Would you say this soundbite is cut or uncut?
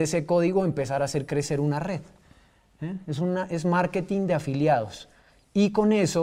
uncut